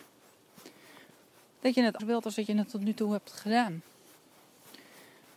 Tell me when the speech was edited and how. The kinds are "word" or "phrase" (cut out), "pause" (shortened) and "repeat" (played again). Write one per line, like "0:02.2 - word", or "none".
0:02.0 - word